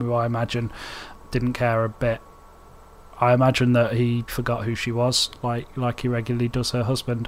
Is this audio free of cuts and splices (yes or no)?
no